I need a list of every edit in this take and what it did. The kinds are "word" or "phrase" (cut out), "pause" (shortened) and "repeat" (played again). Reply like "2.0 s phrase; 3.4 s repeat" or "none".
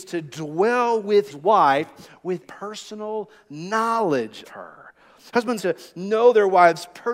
1.3 s word; 2.4 s word; 4.4 s word; 5.6 s word